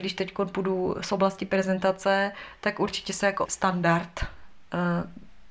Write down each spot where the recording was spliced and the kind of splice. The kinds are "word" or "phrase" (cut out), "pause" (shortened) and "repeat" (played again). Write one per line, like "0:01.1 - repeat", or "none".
0:03.5 - word